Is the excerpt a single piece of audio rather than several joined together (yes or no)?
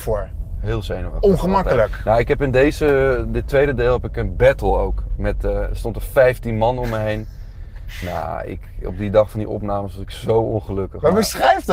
yes